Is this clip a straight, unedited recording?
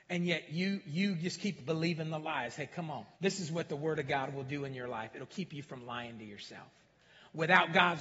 no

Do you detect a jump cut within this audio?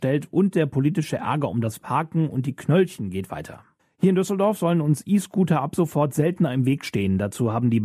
yes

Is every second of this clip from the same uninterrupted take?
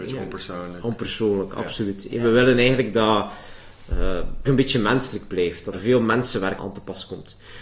no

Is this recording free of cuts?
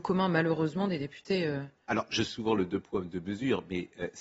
no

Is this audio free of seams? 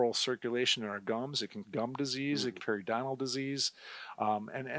no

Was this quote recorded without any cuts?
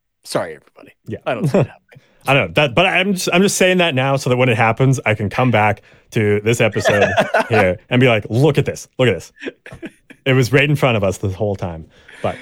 yes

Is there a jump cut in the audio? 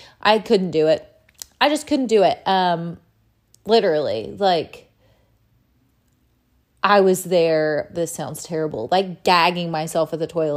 no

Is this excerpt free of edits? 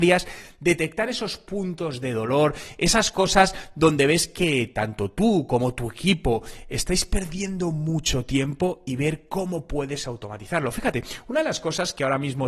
yes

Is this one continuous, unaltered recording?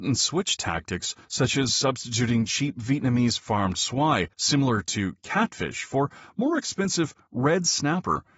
no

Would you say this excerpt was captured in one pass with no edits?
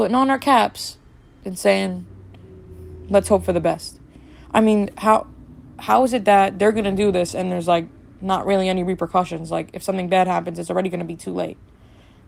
yes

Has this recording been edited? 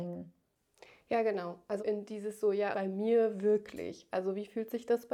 yes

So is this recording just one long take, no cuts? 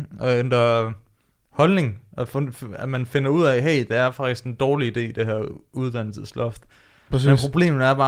yes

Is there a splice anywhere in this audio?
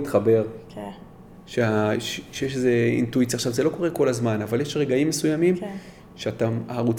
no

